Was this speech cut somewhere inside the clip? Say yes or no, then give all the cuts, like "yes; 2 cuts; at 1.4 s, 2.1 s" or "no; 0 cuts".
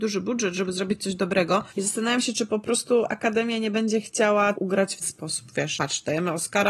yes; 4 cuts; at 1.7 s, 4.5 s, 5.0 s, 5.7 s